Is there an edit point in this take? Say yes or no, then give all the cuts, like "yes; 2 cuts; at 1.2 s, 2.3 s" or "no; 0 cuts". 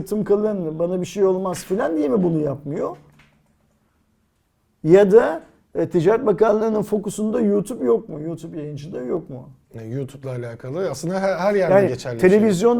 no; 0 cuts